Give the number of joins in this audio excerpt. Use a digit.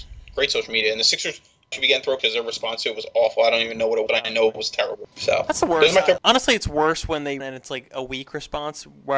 6